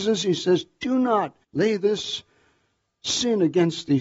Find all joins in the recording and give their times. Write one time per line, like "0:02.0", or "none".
0:01.4